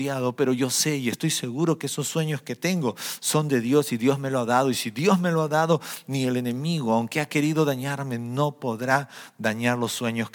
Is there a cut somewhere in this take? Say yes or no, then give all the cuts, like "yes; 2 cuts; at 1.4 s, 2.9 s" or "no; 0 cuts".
no; 0 cuts